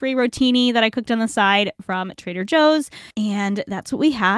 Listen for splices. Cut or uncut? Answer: cut